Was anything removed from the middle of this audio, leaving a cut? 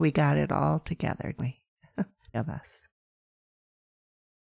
yes; 2 cuts; at 1.4 s, 2.3 s

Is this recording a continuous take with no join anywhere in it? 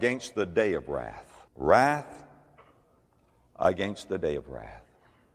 no; 1 cut; at 1.5 s

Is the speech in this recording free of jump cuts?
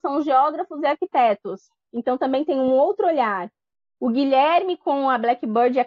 yes; 0 cuts

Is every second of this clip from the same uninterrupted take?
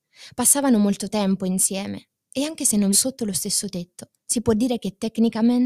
no; 2 cuts; at 2.9 s, 4.2 s

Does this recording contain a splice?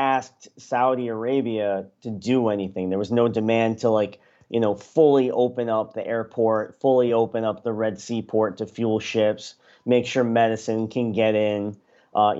no; 0 cuts

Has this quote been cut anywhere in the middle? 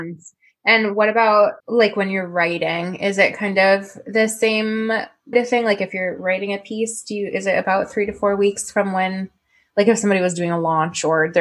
yes; 2 cuts; at 1.6 s, 5.3 s

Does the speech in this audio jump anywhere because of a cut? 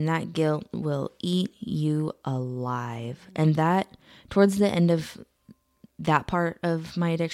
no; 0 cuts

